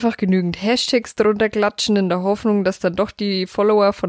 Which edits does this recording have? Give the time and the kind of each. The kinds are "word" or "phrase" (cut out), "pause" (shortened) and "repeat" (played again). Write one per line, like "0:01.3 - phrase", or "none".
none